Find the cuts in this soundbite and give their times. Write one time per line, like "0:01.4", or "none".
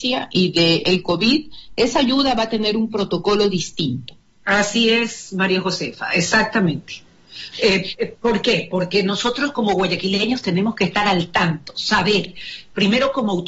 none